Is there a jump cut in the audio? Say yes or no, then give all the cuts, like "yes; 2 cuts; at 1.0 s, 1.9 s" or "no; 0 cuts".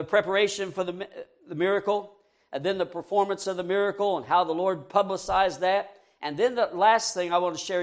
no; 0 cuts